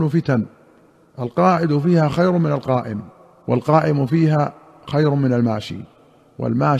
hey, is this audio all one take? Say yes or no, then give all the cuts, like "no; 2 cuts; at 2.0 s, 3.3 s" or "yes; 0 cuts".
yes; 0 cuts